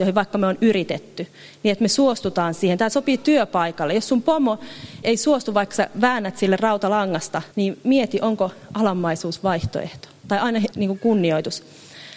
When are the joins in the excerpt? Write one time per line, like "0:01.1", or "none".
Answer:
0:05.0
0:07.5
0:10.7

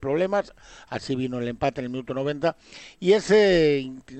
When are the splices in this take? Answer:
none

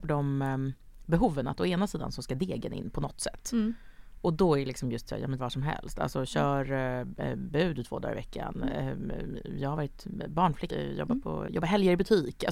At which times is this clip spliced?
0:05.4
0:10.7
0:11.5

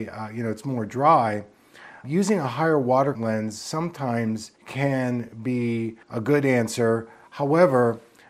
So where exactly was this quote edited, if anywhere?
0:02.0
0:03.1
0:04.6
0:06.0

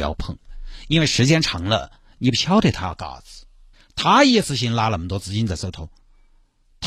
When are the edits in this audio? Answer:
0:03.7

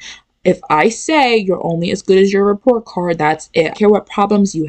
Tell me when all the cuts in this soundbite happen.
0:03.2
0:03.7

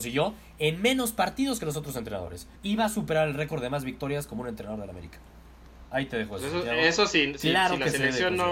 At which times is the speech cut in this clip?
0:02.6

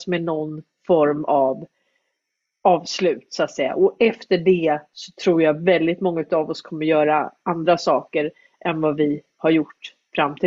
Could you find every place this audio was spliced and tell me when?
none

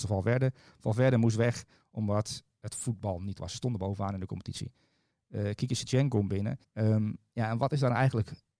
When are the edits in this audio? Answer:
0:03.4
0:06.6

